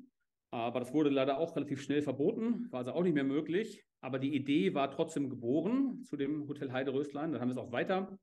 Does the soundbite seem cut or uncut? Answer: uncut